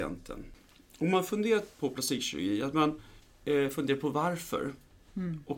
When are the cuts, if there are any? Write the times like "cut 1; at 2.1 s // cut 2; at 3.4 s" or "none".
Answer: none